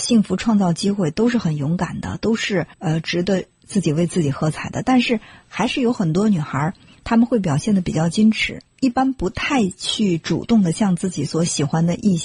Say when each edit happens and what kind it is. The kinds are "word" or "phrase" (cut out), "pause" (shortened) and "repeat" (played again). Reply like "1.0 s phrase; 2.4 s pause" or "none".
2.7 s pause; 8.7 s pause